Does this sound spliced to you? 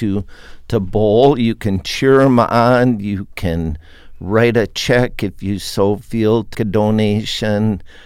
yes; 1 cut; at 6.5 s

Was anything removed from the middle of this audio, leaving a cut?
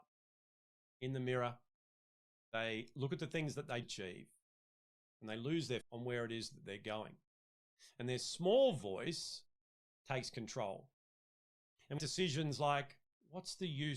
yes; 3 cuts; at 3.8 s, 5.8 s, 12.0 s

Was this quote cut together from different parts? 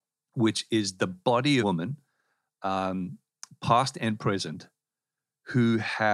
yes; 1 cut; at 1.6 s

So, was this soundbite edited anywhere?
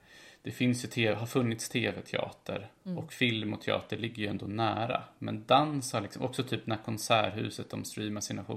yes; 1 cut; at 2.8 s

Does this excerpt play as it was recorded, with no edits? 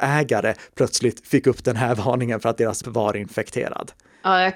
no; 1 cut; at 2.8 s

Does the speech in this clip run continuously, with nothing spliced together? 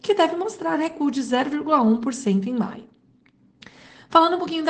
yes; 0 cuts

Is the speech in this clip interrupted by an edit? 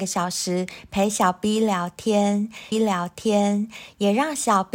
yes; 1 cut; at 2.7 s

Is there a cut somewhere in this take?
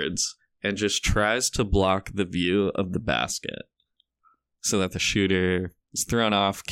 no; 0 cuts

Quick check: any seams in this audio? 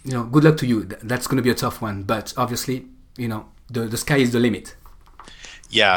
no; 0 cuts

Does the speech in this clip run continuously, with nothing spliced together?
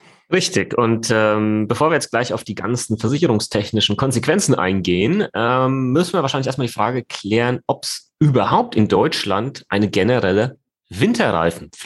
yes; 0 cuts

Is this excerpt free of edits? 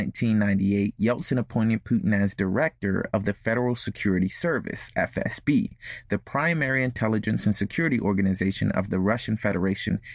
yes; 0 cuts

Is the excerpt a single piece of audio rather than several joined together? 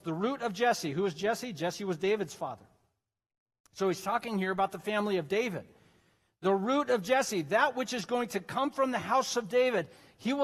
yes; 0 cuts

